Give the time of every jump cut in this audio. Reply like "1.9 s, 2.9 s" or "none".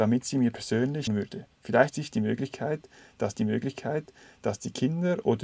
1.1 s, 1.9 s, 3.3 s